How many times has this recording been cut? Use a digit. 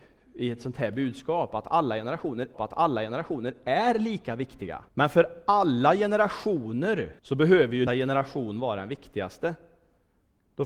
4